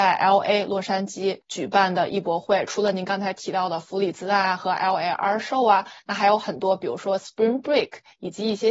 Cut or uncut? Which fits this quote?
cut